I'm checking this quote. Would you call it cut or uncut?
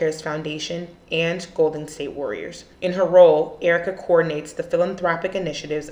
cut